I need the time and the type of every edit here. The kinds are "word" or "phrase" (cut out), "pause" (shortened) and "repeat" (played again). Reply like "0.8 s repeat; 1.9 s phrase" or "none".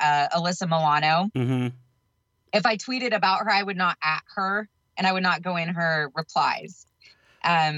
none